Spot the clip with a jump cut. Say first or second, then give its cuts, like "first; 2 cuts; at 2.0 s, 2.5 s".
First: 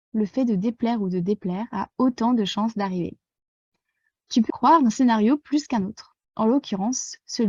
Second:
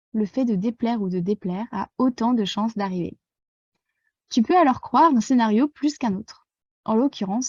first; 2 cuts; at 4.5 s, 6.2 s